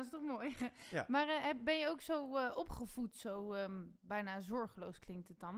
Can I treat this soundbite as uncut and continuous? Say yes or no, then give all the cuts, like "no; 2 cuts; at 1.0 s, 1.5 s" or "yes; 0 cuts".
yes; 0 cuts